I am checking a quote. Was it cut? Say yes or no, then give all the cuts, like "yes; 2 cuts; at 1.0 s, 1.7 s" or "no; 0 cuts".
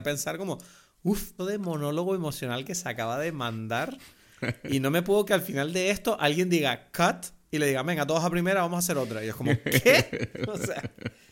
yes; 2 cuts; at 1.4 s, 5.3 s